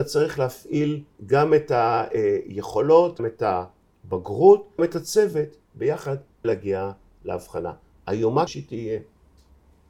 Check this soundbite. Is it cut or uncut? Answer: cut